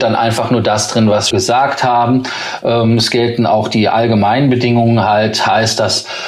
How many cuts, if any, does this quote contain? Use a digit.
1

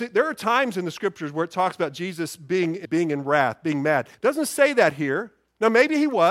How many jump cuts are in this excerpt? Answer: 2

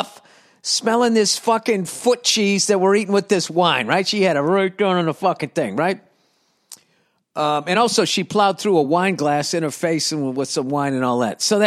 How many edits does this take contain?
0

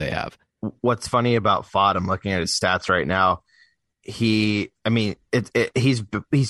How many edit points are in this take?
0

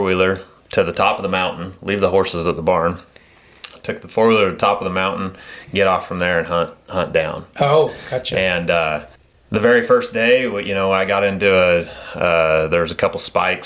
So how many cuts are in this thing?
1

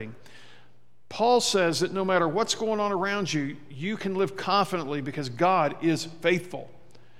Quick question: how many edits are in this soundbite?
0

